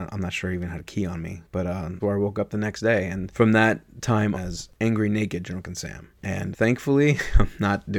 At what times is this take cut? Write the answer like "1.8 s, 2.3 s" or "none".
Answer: 2.0 s, 4.3 s, 6.5 s